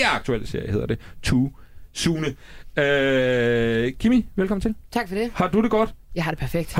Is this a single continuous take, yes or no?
yes